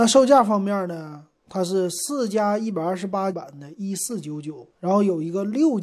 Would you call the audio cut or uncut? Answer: cut